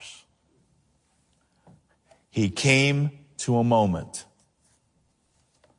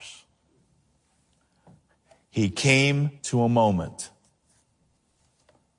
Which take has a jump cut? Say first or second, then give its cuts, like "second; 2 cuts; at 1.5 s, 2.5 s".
second; 1 cut; at 3.2 s